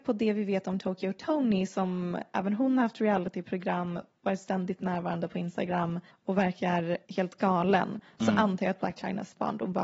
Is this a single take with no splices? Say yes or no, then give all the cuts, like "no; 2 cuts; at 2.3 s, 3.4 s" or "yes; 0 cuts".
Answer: no; 3 cuts; at 4.1 s, 6.1 s, 7.0 s